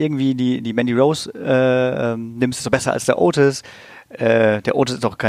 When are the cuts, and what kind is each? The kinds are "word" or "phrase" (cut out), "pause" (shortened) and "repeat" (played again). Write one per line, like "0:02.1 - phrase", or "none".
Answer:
none